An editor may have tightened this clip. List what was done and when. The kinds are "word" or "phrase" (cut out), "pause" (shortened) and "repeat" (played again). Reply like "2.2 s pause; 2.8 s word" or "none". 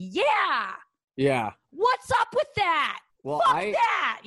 3.1 s pause